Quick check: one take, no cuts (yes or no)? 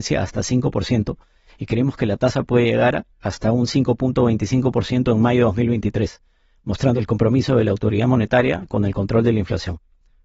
yes